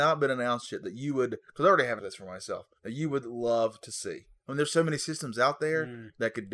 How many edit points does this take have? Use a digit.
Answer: 2